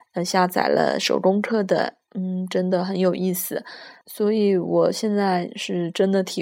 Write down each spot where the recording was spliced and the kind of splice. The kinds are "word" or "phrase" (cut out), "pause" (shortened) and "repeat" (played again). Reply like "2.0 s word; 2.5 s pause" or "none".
2.1 s word; 4.0 s pause